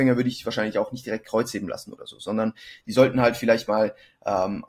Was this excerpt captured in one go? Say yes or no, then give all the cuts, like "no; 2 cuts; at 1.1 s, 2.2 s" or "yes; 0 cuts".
yes; 0 cuts